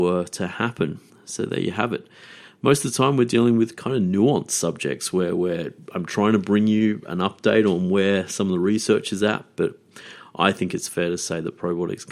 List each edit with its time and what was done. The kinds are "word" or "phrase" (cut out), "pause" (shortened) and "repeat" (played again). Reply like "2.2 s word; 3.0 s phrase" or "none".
1.1 s pause